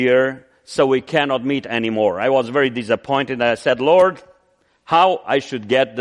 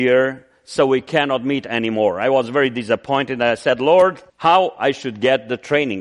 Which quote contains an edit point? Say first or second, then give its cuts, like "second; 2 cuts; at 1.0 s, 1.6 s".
second; 1 cut; at 4.3 s